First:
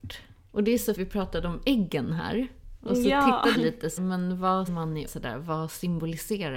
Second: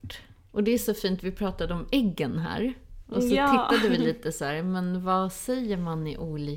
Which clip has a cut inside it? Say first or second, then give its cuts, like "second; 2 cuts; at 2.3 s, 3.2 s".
first; 5 cuts; at 0.9 s, 3.5 s, 4.0 s, 4.7 s, 5.1 s